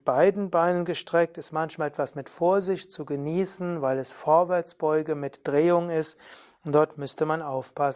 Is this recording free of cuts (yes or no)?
yes